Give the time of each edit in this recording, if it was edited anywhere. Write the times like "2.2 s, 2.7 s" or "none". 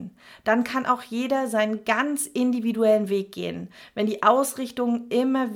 none